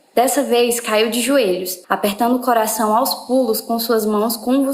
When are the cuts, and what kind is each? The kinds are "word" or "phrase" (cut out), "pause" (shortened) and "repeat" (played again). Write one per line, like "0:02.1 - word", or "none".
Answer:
0:01.8 - pause